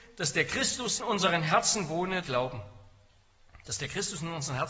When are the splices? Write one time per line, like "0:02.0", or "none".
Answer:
0:01.0
0:02.2